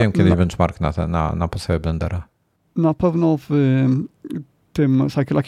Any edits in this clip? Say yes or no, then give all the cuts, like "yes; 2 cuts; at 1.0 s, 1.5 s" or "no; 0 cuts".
no; 0 cuts